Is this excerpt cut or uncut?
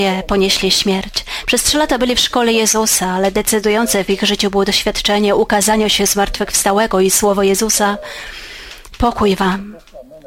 uncut